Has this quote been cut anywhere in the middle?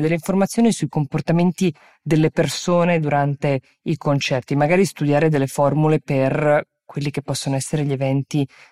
no; 0 cuts

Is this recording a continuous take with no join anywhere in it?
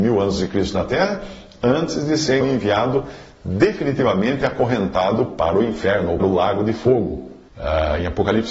no; 3 cuts; at 2.4 s, 6.2 s, 7.5 s

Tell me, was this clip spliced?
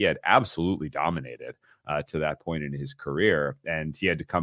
no; 0 cuts

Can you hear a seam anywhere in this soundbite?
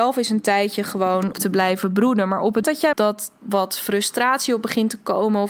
yes; 4 cuts; at 1.3 s, 2.6 s, 2.9 s, 3.4 s

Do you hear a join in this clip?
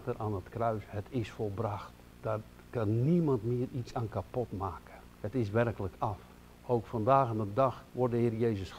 yes; 4 cuts; at 2.1 s, 5.1 s, 6.3 s, 7.9 s

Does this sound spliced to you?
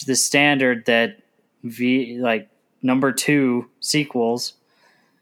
no; 0 cuts

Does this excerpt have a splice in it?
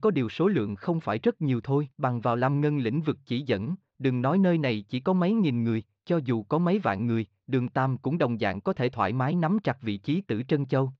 yes; 1 cut; at 1.9 s

